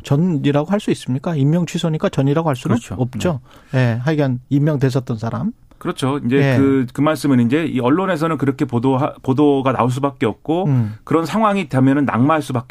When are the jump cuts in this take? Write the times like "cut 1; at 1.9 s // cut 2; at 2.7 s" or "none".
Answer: none